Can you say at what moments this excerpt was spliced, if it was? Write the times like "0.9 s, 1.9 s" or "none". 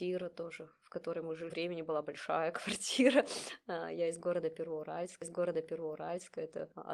1.5 s, 5.2 s